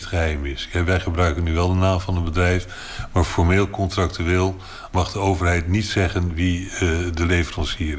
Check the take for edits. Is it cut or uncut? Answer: uncut